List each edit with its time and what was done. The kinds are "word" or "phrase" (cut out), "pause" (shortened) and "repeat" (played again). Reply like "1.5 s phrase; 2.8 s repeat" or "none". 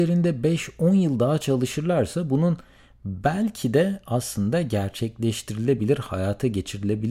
none

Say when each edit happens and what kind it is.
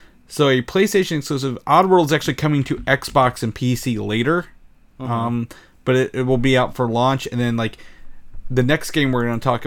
none

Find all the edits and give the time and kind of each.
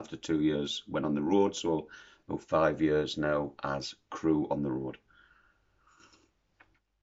none

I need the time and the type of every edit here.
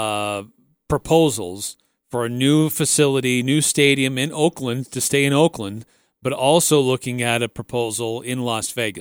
none

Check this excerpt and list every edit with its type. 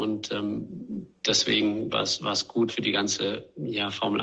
1.9 s phrase; 2.7 s word

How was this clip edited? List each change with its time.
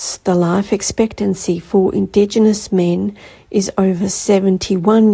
none

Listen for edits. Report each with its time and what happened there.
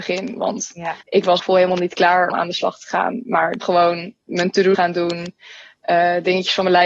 1.0 s pause; 1.4 s phrase; 2.3 s word; 3.6 s word; 4.2 s pause; 4.7 s word

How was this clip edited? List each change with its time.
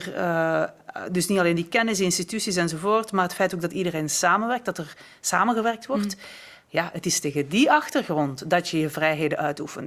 none

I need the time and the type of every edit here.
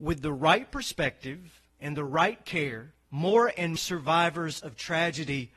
1.7 s pause; 3.0 s pause; 3.8 s word

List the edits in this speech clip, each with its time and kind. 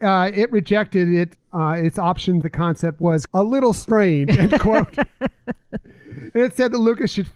1.3 s word; 2.4 s phrase; 3.3 s word

